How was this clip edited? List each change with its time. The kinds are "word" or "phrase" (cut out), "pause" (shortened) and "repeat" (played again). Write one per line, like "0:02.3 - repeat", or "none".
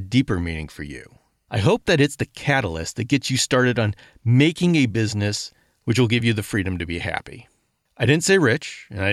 none